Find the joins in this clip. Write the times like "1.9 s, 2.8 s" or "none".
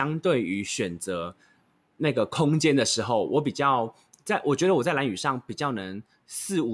none